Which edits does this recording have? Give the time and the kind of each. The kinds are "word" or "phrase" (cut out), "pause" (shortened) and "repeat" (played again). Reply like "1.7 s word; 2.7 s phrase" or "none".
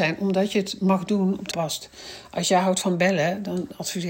1.5 s phrase